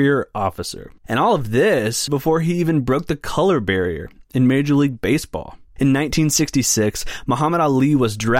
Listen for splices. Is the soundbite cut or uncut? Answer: cut